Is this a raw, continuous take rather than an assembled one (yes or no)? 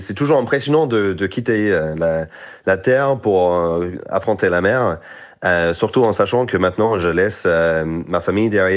yes